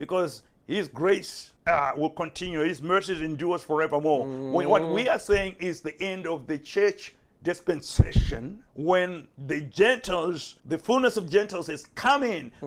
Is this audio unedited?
no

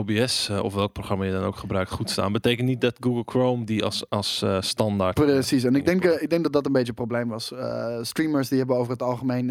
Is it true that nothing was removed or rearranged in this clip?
yes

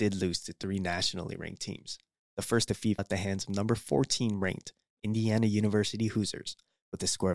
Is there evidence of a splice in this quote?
yes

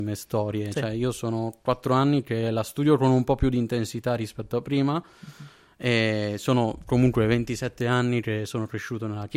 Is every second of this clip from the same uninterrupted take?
yes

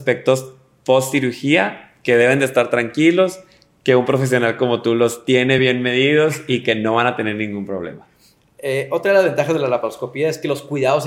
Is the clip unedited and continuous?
yes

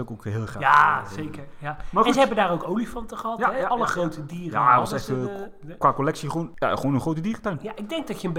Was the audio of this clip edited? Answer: no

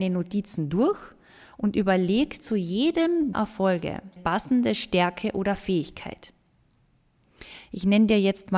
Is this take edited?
yes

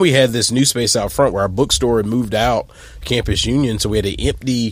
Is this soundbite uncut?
no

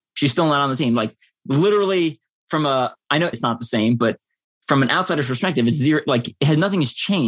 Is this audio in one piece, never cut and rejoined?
no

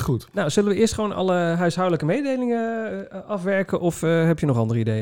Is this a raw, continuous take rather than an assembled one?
yes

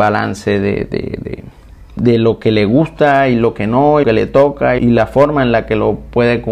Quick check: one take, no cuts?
no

